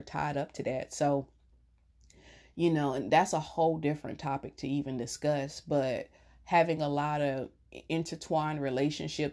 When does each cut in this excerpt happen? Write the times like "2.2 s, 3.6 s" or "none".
none